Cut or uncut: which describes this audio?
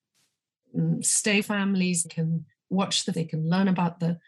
cut